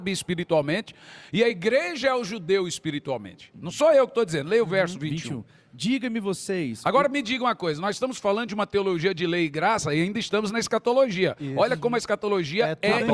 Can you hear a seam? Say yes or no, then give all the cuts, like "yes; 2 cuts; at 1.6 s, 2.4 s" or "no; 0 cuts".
no; 0 cuts